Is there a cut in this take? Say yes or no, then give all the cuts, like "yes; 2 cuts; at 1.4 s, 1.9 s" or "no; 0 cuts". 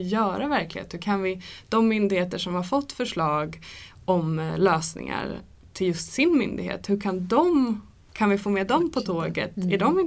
no; 0 cuts